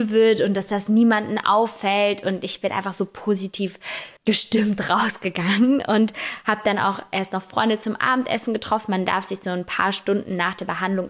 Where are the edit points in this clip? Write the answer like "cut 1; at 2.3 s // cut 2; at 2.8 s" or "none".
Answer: cut 1; at 4.2 s